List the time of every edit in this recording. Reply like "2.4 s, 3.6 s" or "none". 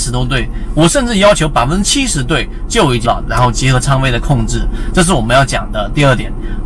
3.0 s